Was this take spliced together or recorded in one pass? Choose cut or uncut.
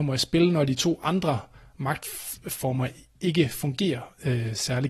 uncut